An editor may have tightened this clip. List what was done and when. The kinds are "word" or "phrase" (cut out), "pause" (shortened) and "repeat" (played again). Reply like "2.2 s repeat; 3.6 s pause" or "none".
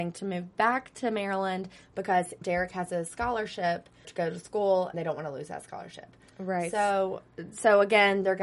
2.4 s word; 4.0 s word; 4.9 s word